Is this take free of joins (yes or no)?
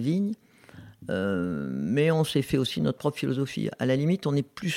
yes